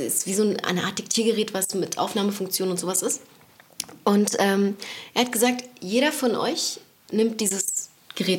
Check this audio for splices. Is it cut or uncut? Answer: uncut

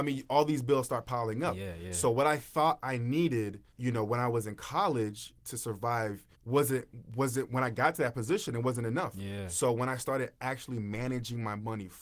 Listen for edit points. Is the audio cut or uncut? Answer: cut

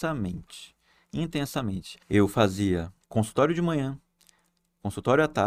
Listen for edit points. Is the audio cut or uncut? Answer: cut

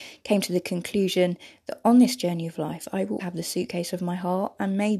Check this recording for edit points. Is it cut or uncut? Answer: cut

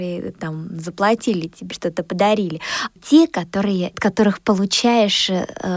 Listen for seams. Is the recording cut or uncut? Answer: cut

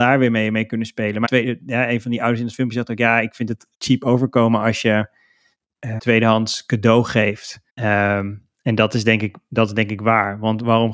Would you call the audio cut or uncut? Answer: cut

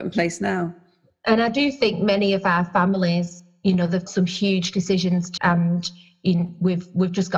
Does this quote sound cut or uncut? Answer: cut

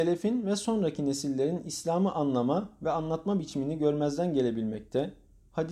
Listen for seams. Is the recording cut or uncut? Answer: uncut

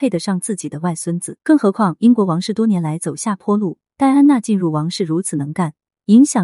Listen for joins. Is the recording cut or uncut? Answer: cut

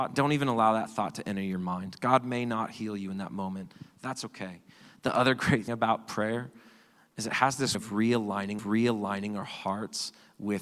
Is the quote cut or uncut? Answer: cut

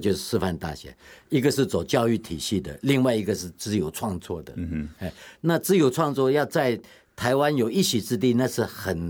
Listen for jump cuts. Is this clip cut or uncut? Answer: uncut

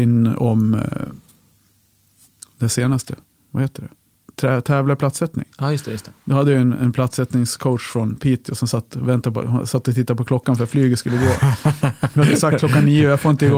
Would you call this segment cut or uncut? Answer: uncut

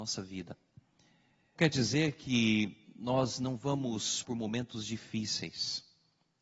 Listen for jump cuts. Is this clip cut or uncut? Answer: cut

